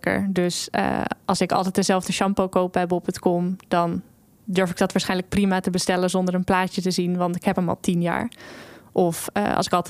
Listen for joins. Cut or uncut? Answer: uncut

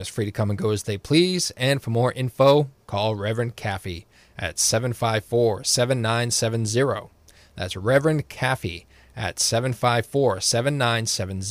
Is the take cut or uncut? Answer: uncut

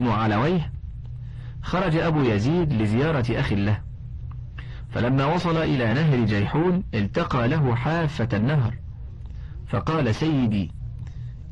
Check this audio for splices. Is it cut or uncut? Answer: uncut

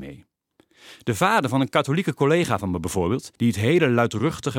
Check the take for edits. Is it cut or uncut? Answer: cut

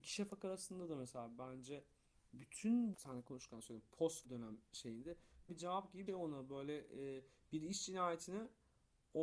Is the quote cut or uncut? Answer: cut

